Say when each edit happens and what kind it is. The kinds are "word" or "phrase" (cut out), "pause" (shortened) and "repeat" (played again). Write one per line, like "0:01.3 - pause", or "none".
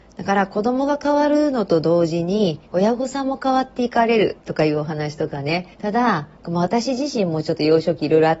0:02.7 - pause
0:04.4 - pause
0:05.7 - pause
0:06.4 - pause